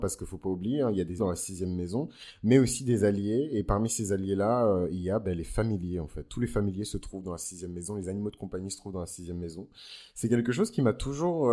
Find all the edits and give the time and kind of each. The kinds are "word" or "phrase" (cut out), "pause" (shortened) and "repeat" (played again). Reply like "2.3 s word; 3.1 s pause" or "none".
1.2 s word